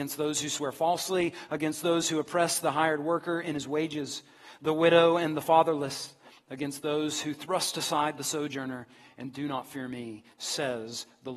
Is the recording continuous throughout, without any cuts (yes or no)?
yes